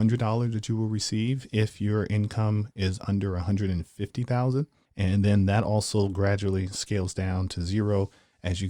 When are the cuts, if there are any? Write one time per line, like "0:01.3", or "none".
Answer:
0:04.9